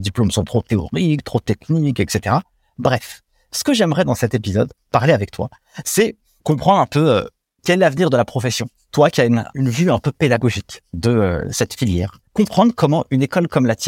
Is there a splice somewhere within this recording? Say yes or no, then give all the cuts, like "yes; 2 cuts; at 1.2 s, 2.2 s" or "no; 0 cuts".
no; 0 cuts